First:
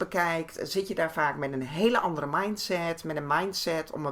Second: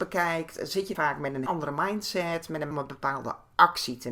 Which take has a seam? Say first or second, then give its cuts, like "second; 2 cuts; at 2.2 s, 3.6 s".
second; 3 cuts; at 0.9 s, 1.5 s, 2.7 s